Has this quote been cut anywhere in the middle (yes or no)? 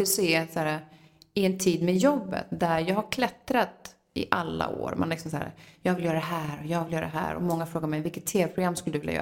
no